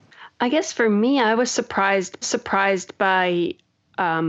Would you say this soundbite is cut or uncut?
cut